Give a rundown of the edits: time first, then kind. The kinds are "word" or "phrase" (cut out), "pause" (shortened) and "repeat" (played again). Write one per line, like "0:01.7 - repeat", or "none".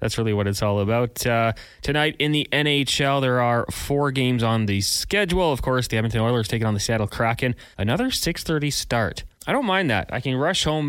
0:07.7 - pause
0:09.3 - pause